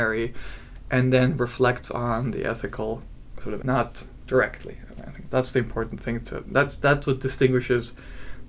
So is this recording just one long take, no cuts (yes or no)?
no